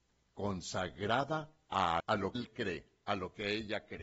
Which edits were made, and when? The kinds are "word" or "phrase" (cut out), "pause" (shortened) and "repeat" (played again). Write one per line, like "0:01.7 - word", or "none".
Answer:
0:02.0 - word
0:02.4 - word